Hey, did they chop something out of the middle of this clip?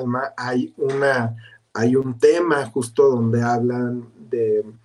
no; 0 cuts

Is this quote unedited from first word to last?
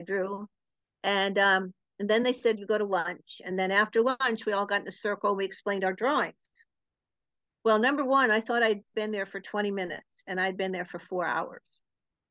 yes; 0 cuts

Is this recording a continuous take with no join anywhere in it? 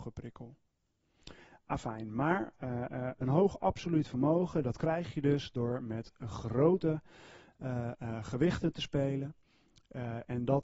yes; 0 cuts

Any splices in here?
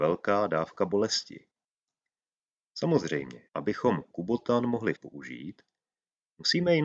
yes; 2 cuts; at 3.5 s, 4.9 s

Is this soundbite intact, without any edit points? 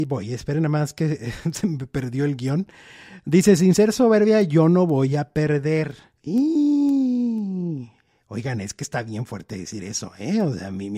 yes; 0 cuts

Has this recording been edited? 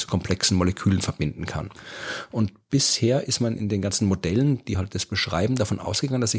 no; 0 cuts

